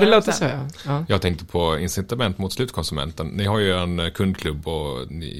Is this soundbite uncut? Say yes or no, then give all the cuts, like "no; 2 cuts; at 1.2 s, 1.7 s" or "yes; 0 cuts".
yes; 0 cuts